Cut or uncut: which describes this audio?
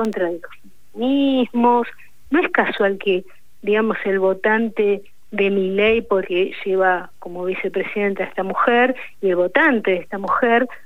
cut